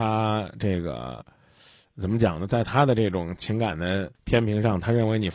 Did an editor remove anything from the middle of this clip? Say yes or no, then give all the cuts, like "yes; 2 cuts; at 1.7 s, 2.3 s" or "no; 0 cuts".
yes; 1 cut; at 4.2 s